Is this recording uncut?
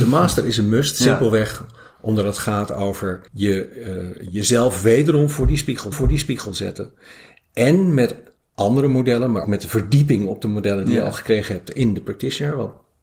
no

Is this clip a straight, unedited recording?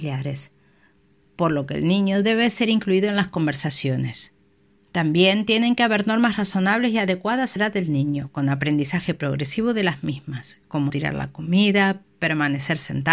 no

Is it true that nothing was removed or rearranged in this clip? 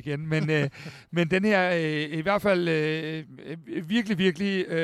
yes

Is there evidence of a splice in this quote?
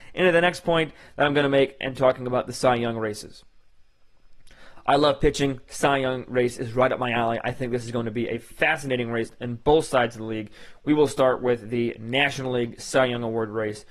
no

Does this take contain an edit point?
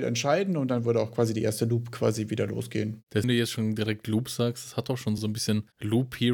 yes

